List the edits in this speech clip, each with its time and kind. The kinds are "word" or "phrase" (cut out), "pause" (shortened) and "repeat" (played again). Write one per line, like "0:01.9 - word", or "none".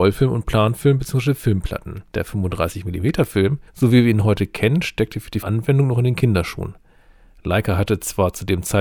0:02.1 - pause
0:03.7 - pause
0:05.4 - word